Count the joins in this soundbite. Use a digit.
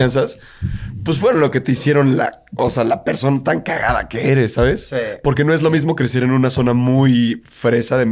0